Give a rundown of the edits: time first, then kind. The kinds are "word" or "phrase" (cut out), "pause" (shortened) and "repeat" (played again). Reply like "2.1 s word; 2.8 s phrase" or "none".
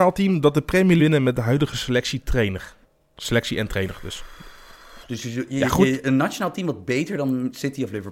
1.0 s phrase; 2.8 s pause